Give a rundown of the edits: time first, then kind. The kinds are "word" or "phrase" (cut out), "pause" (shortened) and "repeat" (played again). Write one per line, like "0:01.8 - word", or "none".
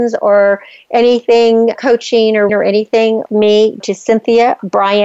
0:01.8 - word
0:02.5 - word
0:03.3 - word
0:03.8 - word